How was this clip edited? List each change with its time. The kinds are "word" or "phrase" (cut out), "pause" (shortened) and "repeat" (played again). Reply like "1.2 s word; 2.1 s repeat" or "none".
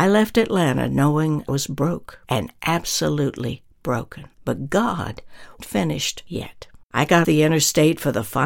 1.5 s word; 2.2 s pause; 4.3 s pause; 5.6 s word; 6.8 s pause; 7.2 s word